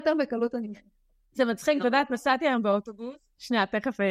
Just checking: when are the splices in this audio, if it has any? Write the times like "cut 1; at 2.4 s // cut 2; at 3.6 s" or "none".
none